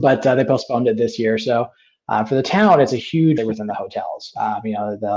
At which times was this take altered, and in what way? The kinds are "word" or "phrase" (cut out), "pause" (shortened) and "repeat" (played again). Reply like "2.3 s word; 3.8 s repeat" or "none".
3.4 s phrase